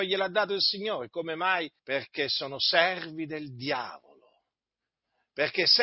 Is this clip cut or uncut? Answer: cut